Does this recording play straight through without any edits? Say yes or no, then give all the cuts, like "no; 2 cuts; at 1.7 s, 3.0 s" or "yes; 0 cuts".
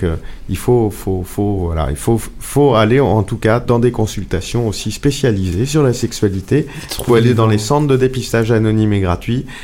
yes; 0 cuts